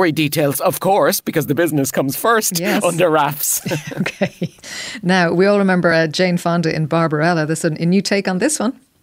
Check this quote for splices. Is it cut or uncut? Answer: uncut